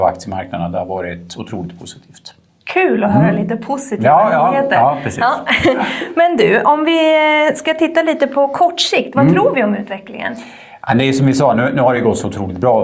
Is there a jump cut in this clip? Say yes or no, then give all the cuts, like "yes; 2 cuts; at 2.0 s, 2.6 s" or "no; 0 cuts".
no; 0 cuts